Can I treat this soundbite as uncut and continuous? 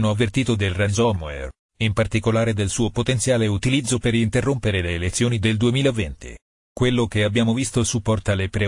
yes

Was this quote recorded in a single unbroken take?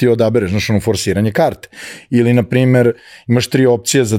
yes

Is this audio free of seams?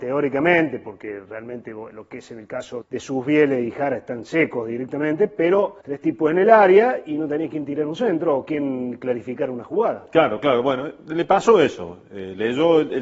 no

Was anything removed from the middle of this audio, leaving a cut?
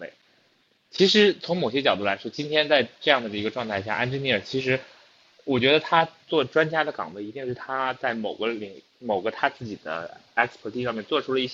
no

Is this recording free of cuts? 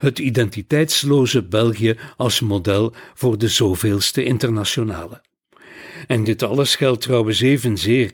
yes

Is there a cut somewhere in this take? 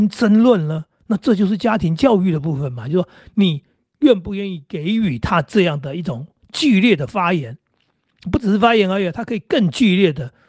yes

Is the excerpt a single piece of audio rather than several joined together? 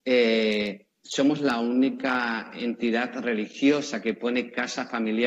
yes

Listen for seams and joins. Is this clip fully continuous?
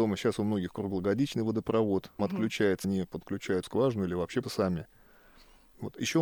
no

